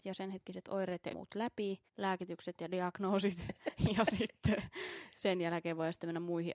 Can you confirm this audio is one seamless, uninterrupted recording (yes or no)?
no